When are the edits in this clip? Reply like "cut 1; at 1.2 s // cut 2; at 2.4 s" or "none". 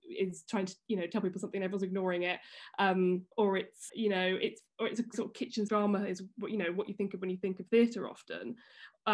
cut 1; at 3.3 s // cut 2; at 3.9 s // cut 3; at 5.1 s // cut 4; at 5.7 s